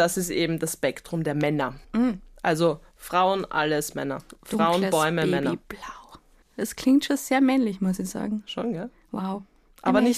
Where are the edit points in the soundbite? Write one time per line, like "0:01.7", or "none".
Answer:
0:01.8
0:06.4